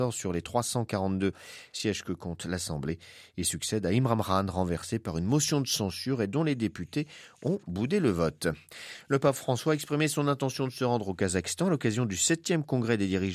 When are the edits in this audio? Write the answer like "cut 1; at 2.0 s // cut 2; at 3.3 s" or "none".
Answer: none